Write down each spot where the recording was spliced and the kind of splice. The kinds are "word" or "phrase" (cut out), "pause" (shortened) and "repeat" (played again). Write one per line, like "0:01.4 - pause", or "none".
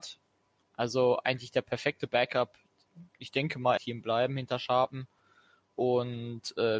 0:03.1 - pause
0:03.8 - phrase